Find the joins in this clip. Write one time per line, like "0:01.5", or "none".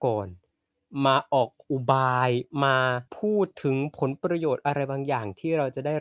0:03.1